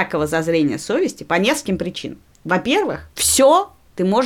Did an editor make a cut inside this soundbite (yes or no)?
no